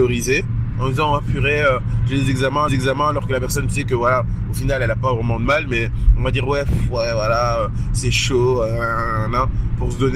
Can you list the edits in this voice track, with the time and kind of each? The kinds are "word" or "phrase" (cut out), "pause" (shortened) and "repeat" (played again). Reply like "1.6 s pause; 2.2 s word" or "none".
2.7 s repeat